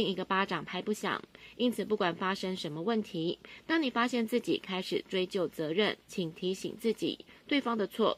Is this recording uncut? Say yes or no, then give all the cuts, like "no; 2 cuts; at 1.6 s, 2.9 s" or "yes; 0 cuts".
no; 1 cut; at 6.0 s